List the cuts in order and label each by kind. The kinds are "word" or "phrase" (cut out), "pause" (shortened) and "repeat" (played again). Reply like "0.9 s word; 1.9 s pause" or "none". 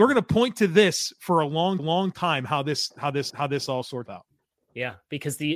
1.8 s repeat; 3.3 s repeat; 4.1 s word